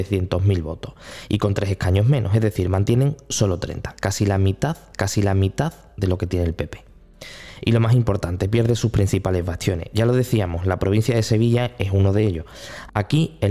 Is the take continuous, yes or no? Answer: no